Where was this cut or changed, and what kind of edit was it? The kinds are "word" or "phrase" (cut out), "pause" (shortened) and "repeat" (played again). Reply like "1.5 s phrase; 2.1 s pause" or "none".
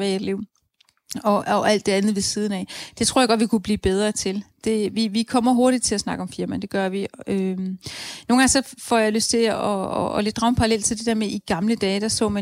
none